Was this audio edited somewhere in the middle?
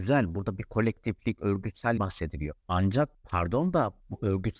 yes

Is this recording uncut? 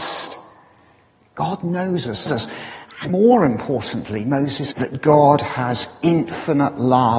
no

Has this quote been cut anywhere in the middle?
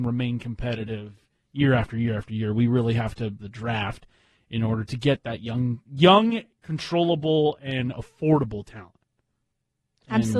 yes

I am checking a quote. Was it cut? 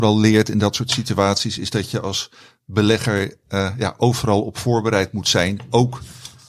no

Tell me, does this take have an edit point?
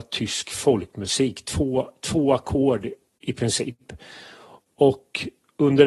no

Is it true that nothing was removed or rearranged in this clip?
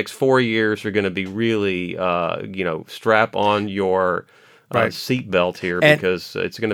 yes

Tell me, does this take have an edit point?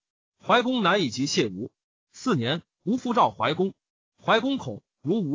no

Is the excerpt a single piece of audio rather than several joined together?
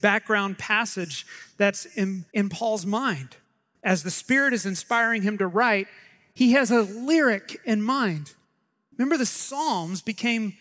no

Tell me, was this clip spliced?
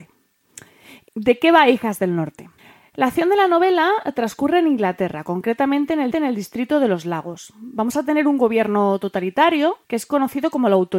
yes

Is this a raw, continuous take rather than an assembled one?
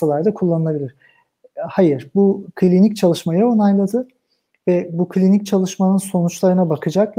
yes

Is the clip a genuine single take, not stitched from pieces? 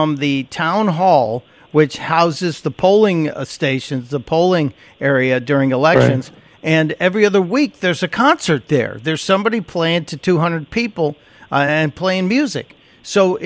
yes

